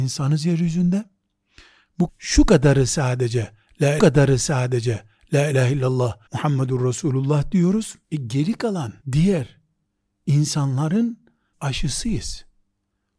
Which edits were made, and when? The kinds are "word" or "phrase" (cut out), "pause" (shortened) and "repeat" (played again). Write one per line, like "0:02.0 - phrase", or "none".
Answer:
0:02.1 - phrase
0:04.0 - repeat
0:06.3 - pause
0:08.0 - pause
0:09.0 - pause
0:11.5 - word